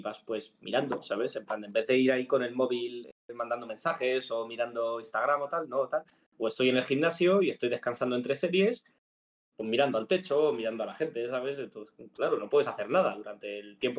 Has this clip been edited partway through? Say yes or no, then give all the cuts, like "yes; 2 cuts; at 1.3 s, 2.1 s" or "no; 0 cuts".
no; 0 cuts